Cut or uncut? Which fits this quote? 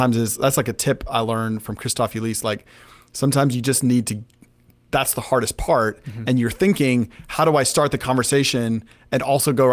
uncut